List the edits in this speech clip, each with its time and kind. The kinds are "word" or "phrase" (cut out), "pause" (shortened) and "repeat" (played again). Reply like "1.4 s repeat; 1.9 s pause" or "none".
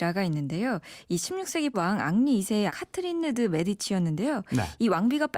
1.7 s word; 2.7 s word